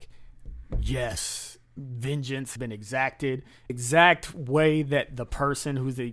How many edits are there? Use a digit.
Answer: 2